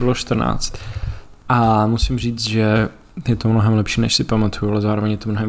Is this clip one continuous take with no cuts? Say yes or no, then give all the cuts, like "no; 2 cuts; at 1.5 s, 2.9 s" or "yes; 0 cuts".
yes; 0 cuts